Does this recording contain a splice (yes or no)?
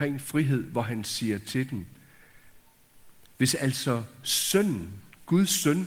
no